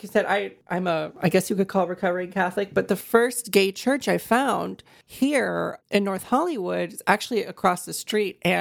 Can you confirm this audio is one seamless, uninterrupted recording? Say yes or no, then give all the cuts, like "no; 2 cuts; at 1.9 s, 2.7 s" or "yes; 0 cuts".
no; 1 cut; at 5.8 s